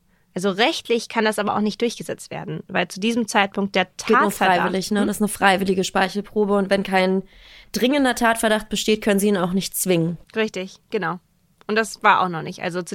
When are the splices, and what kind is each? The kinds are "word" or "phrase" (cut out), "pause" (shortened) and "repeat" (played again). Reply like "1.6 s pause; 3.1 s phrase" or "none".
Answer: 10.2 s pause